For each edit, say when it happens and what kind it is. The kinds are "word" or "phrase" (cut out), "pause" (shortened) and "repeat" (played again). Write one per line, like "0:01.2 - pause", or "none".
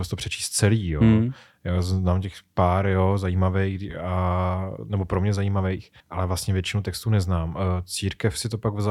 0:06.0 - pause

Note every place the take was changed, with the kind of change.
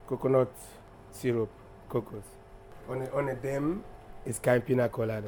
none

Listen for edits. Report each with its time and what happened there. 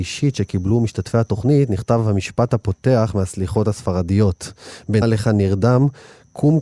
0:05.0 - word

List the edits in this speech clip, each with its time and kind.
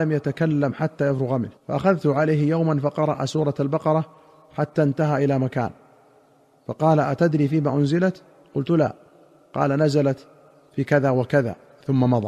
0:01.6 - pause

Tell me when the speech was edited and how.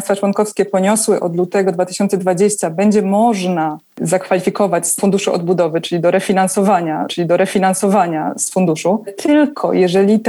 0:05.0 - word
0:07.1 - repeat
0:09.1 - word

